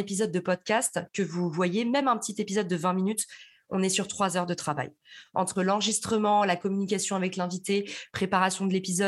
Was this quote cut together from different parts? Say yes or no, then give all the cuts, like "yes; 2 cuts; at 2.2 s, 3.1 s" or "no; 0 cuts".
no; 0 cuts